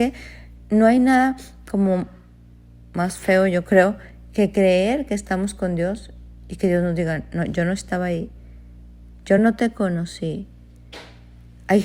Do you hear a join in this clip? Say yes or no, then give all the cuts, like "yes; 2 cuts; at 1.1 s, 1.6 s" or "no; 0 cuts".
no; 0 cuts